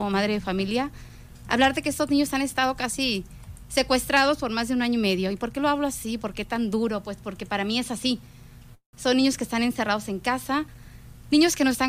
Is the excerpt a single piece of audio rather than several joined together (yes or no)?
yes